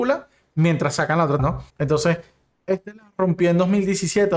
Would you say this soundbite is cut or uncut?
cut